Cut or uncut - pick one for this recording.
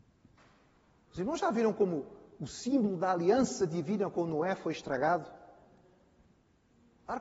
uncut